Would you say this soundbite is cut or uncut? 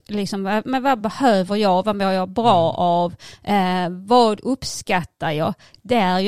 uncut